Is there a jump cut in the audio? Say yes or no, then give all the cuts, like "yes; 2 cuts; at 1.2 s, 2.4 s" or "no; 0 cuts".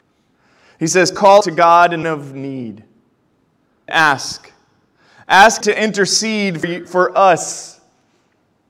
yes; 5 cuts; at 1.4 s, 2.0 s, 3.9 s, 5.6 s, 6.6 s